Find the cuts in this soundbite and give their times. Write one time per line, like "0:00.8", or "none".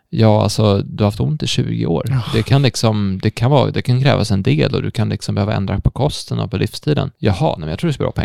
0:07.1